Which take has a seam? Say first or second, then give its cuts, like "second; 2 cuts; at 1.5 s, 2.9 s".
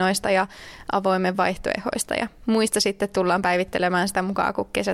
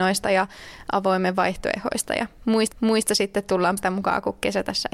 second; 2 cuts; at 2.7 s, 3.8 s